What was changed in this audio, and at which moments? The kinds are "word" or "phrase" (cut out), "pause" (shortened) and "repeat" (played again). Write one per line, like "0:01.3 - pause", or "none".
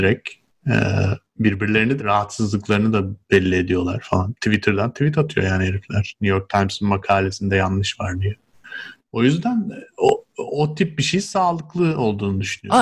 0:02.0 - phrase